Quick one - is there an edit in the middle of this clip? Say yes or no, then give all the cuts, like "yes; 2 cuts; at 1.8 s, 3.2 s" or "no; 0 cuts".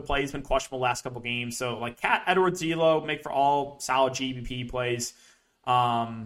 no; 0 cuts